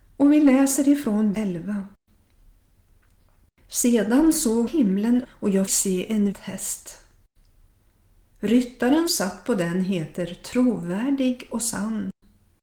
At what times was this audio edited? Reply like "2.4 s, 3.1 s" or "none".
1.3 s, 4.7 s, 5.2 s, 5.7 s, 6.3 s, 9.1 s